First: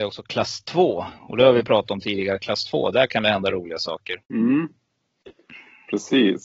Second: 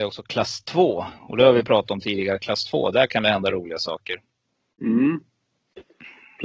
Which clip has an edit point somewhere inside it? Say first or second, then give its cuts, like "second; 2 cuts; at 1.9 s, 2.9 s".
first; 1 cut; at 4.2 s